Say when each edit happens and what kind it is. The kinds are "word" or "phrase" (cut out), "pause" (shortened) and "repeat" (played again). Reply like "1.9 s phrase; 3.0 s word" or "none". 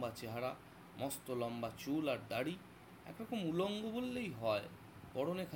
none